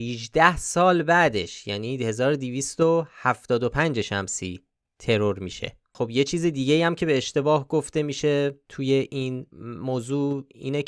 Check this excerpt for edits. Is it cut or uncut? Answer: uncut